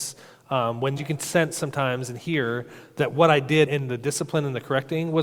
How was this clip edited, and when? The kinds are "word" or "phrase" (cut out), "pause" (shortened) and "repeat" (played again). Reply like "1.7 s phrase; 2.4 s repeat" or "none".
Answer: 1.0 s phrase; 3.7 s word